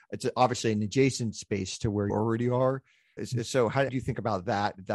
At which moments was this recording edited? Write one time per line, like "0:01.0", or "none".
0:02.1
0:03.2
0:03.9